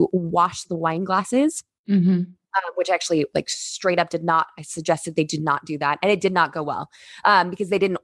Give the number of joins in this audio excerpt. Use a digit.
0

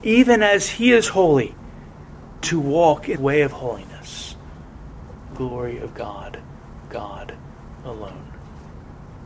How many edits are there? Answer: 4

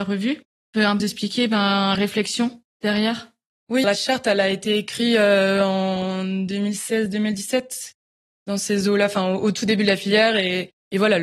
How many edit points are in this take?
3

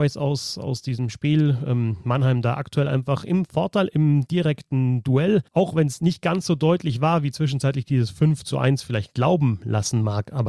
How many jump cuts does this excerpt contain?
1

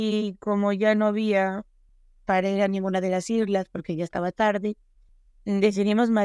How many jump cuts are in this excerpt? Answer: 0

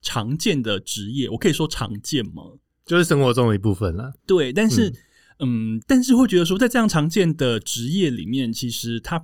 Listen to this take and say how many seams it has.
3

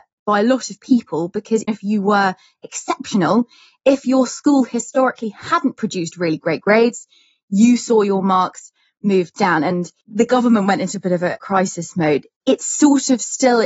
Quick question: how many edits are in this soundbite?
1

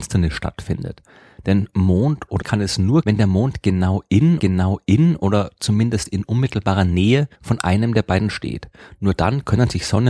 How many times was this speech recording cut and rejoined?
5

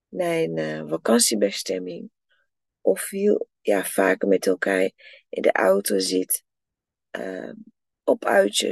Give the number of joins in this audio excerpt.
0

